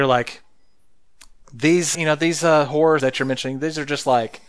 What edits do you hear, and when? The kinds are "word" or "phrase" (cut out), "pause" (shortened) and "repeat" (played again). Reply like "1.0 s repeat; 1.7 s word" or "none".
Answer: 1.9 s word; 3.0 s word